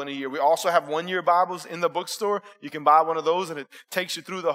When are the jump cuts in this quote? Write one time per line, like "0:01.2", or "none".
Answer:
none